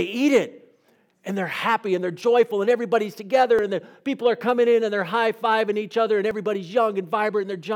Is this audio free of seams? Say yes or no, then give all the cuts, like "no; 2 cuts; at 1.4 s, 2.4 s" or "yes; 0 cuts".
yes; 0 cuts